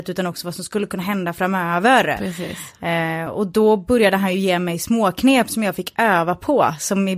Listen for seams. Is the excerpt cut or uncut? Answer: uncut